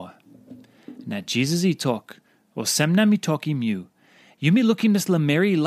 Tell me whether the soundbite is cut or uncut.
uncut